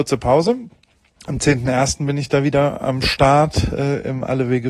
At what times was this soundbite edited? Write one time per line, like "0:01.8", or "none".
none

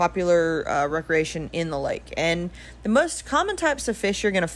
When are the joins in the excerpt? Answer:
none

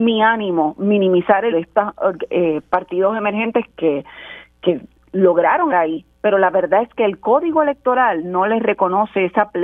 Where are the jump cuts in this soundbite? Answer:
0:01.5
0:03.7
0:05.7

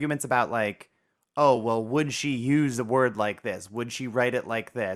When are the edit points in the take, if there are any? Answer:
none

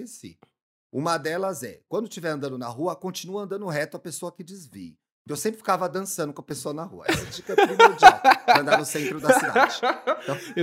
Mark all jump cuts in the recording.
none

